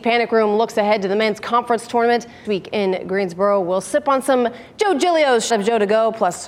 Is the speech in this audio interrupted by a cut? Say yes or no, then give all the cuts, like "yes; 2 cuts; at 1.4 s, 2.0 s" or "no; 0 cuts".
yes; 2 cuts; at 2.4 s, 5.5 s